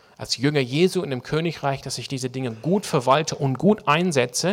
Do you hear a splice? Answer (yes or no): no